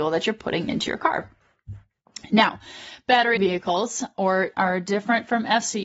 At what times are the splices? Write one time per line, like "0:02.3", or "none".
0:03.4
0:04.5